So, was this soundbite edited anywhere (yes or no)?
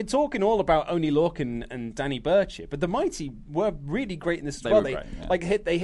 no